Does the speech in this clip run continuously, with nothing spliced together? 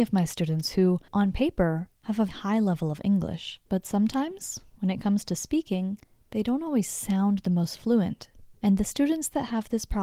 no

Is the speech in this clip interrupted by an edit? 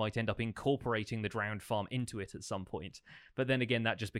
no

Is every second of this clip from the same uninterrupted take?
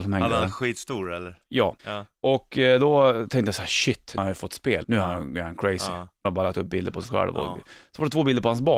no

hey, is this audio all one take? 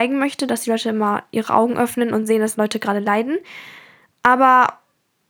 yes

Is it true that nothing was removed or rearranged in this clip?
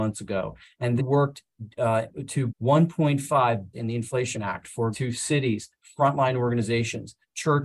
no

